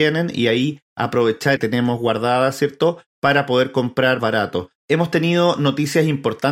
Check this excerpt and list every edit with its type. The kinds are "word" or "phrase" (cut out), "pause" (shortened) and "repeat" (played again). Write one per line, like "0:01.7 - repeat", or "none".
0:01.6 - phrase
0:04.2 - word
0:04.8 - pause